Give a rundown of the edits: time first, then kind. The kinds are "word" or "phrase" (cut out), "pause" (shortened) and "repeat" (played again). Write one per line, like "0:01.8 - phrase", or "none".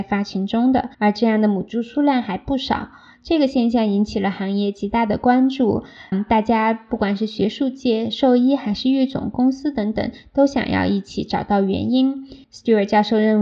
0:00.9 - pause
0:06.1 - word
0:12.4 - pause